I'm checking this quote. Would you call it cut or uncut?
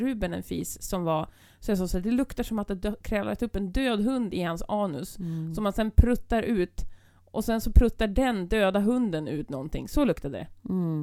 uncut